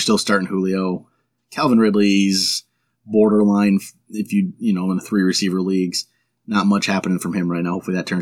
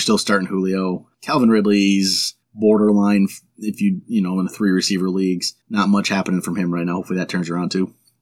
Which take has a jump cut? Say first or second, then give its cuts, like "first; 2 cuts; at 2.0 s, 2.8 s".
second; 3 cuts; at 1.1 s, 2.4 s, 5.6 s